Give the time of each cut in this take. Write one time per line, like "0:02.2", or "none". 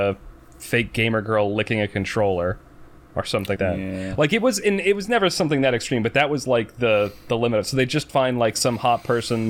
0:03.6